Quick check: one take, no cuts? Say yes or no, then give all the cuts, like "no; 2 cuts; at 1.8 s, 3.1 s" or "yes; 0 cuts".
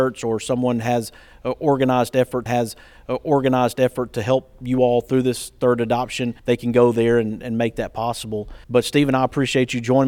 no; 3 cuts; at 2.5 s, 6.4 s, 8.6 s